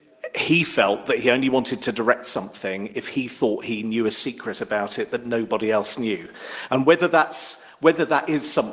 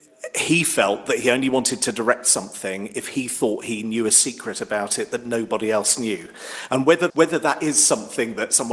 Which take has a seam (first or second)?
second